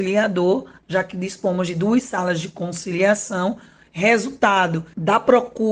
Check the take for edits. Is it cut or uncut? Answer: uncut